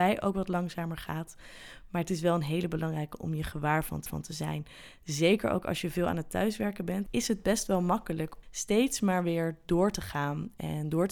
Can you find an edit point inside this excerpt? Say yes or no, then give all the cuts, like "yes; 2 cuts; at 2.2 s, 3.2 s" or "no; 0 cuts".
yes; 2 cuts; at 4.1 s, 8.4 s